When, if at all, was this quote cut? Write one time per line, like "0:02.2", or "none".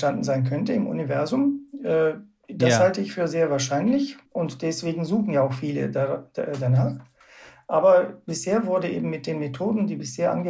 0:04.3

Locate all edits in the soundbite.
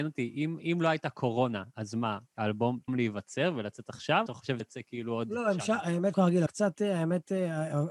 0:02.9
0:04.3
0:04.6
0:06.1
0:06.5

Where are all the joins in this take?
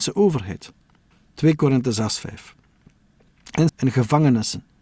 0:01.1
0:02.2
0:03.7

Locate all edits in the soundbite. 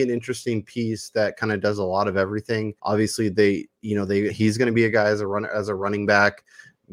0:02.8
0:04.3

